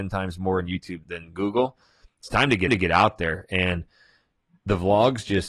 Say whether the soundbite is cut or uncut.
cut